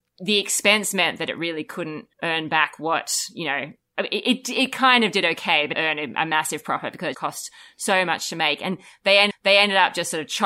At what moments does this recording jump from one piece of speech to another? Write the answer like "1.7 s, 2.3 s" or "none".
2.1 s, 5.7 s, 7.1 s, 9.3 s